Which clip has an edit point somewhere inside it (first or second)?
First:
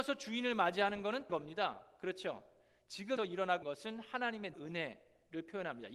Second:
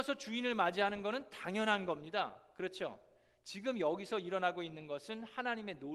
first